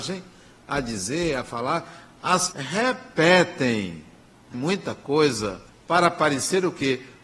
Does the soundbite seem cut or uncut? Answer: cut